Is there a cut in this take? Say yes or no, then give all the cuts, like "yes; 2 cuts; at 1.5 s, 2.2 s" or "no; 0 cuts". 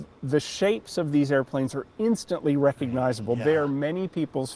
no; 0 cuts